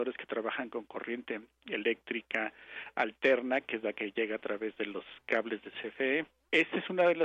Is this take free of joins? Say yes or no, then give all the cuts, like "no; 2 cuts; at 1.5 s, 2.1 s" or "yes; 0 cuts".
yes; 0 cuts